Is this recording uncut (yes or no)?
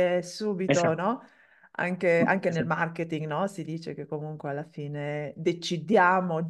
yes